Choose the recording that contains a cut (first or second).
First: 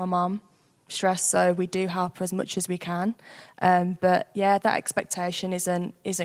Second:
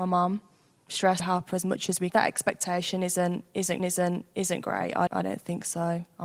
second